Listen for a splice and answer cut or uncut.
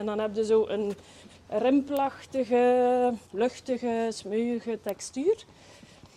cut